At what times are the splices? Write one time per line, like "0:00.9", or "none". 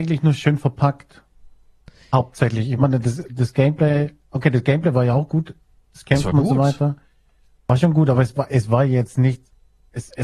none